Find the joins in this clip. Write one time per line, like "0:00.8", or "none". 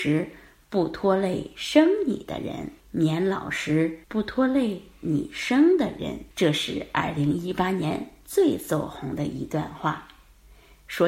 0:02.8
0:04.0
0:06.3